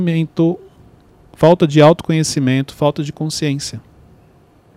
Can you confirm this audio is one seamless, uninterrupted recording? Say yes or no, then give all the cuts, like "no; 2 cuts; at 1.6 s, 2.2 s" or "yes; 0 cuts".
yes; 0 cuts